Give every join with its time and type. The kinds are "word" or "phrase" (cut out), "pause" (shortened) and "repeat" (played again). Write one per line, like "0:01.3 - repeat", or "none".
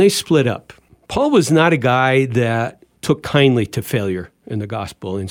none